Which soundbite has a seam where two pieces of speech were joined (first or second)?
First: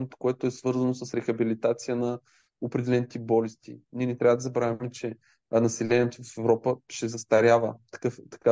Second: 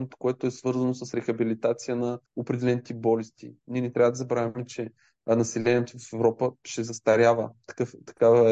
second